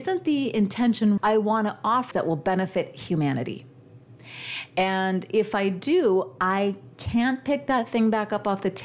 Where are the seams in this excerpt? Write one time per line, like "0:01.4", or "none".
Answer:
0:01.2
0:02.1
0:06.9